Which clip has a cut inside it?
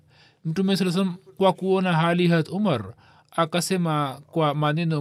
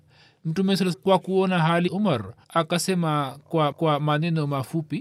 second; 4 cuts; at 0.9 s, 1.9 s, 2.4 s, 3.7 s

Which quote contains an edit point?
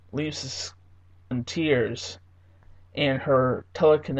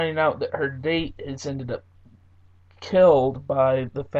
first; 1 cut; at 1.3 s

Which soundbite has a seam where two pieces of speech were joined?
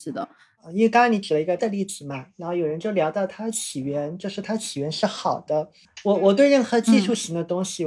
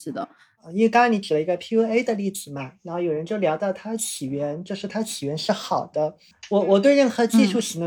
first; 1 cut; at 1.6 s

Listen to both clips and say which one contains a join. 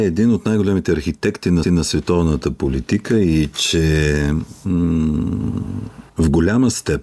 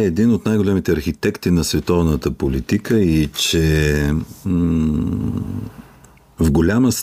first; 2 cuts; at 1.6 s, 6.1 s

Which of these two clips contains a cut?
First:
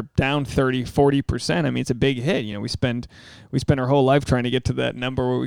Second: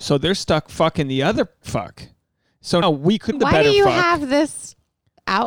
second; 3 cuts; at 1.6 s, 2.8 s, 3.3 s

